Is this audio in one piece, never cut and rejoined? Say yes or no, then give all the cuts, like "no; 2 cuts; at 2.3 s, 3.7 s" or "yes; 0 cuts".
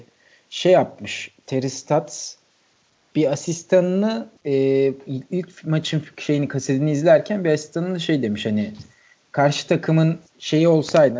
no; 2 cuts; at 4.4 s, 10.3 s